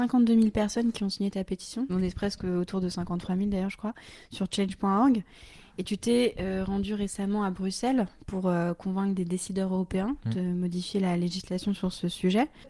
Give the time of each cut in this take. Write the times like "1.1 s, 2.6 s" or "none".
none